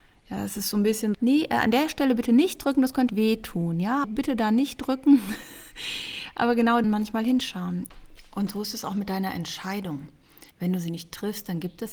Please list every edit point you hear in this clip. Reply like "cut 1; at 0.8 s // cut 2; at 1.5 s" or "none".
cut 1; at 1.1 s // cut 2; at 3.1 s // cut 3; at 4.0 s // cut 4; at 6.8 s // cut 5; at 10.5 s